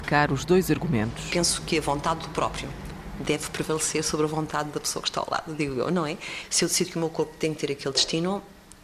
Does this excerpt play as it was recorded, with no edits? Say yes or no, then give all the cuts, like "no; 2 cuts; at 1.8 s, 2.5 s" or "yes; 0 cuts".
yes; 0 cuts